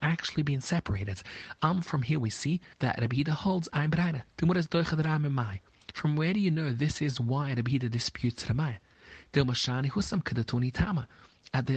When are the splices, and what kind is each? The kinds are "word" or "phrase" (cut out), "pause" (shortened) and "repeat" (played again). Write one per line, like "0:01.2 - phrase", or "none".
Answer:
0:02.7 - pause
0:04.3 - pause